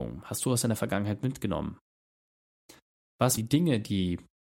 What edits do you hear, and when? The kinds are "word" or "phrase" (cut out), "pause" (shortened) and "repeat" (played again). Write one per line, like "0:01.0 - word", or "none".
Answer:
0:03.4 - word